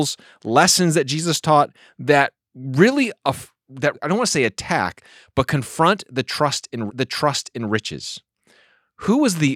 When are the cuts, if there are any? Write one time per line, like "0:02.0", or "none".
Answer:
0:03.9
0:06.9